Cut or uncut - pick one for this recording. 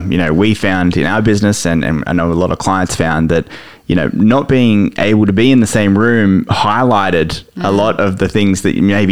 uncut